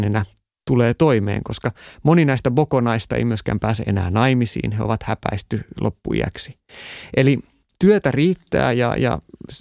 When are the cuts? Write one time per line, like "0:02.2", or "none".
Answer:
none